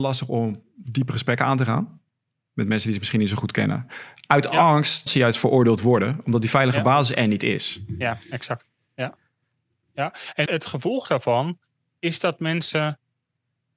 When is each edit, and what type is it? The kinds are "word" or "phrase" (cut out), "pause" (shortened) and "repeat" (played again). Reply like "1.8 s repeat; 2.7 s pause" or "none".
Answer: 5.1 s word; 10.5 s word

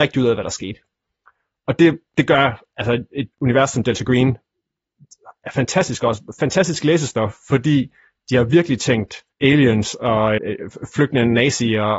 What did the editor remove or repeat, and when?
3.3 s pause; 9.3 s pause; 10.4 s word

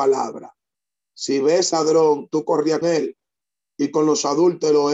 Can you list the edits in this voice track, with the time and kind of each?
1.7 s word; 2.8 s word

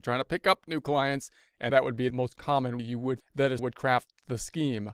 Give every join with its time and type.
1.7 s word; 2.1 s word; 2.8 s word; 3.2 s word; 3.6 s word

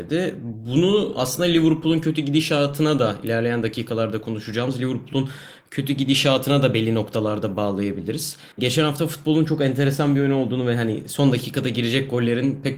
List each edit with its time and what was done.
8.5 s pause

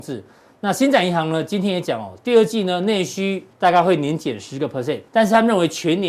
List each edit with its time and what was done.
3.5 s pause; 5.1 s pause

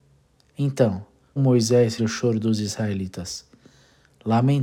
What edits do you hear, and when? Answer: 1.4 s word; 2.0 s word

